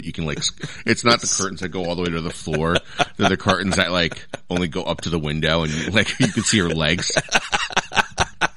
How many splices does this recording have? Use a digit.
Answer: 0